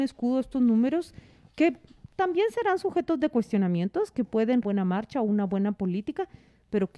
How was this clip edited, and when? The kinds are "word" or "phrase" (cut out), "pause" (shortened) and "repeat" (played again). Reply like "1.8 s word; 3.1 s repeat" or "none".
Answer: 4.6 s phrase